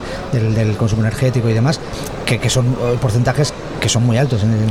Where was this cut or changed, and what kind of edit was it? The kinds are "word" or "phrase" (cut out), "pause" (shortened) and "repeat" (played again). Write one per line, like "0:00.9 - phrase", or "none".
none